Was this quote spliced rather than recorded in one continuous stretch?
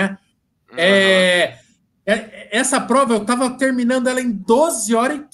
no; 0 cuts

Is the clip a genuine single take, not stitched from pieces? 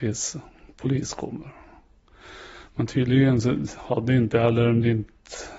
yes; 0 cuts

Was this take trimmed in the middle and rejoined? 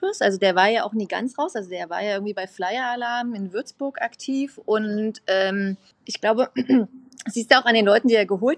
no; 0 cuts

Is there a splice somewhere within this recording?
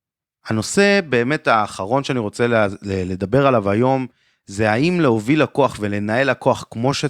no; 0 cuts

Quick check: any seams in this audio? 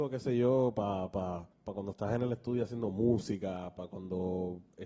yes; 1 cut; at 1.5 s

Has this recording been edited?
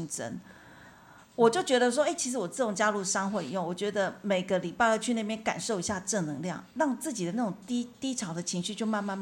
yes; 1 cut; at 6.7 s

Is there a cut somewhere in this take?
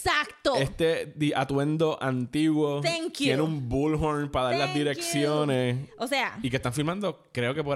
no; 0 cuts

